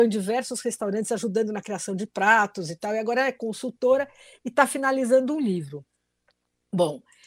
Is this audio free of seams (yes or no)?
yes